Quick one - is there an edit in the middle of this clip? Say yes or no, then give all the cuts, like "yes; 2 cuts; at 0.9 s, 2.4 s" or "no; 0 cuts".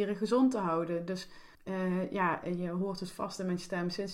yes; 1 cut; at 1.5 s